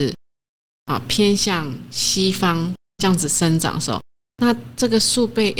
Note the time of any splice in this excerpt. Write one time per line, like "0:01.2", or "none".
0:03.0

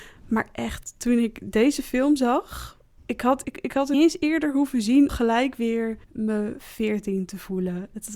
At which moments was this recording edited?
0:03.0
0:03.4
0:03.9
0:05.1
0:06.0

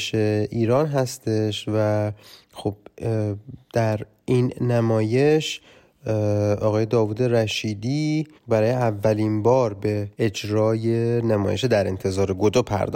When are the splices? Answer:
0:03.6
0:08.4
0:10.1

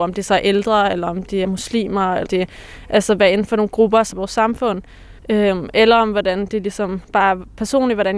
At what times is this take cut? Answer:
0:01.4
0:02.3
0:04.1
0:05.2
0:07.0

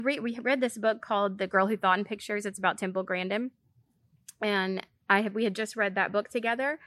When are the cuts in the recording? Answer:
none

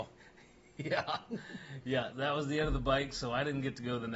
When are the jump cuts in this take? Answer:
0:02.1

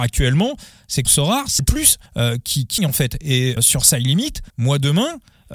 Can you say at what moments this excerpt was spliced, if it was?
0:01.0
0:01.6
0:02.1
0:02.8
0:03.6
0:04.5

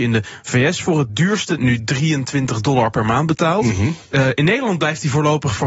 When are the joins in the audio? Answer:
0:01.6
0:04.0

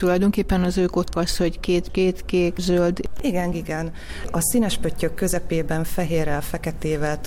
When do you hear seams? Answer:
0:01.1
0:01.9
0:02.6
0:03.5

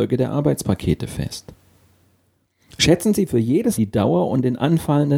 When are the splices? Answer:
0:03.8

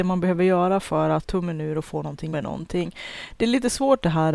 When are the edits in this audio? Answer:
0:01.2
0:02.3

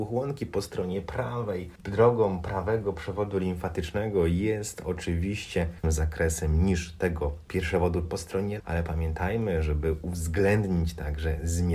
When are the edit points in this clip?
0:05.8
0:08.0
0:08.6

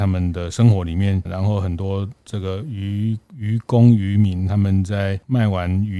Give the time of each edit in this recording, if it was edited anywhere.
0:01.2

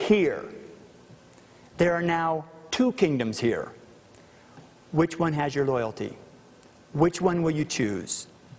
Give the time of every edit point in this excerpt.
none

